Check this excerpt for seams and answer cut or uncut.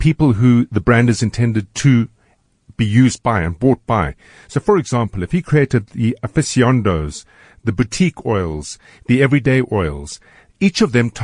uncut